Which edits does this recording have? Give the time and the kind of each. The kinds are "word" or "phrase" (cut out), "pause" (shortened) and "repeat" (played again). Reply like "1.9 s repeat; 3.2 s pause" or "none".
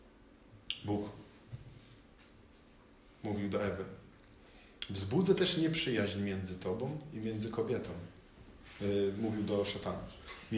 none